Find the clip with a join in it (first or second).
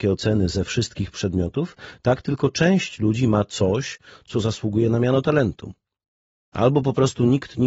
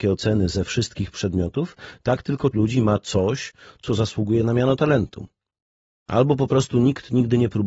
second